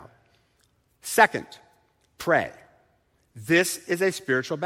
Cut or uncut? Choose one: uncut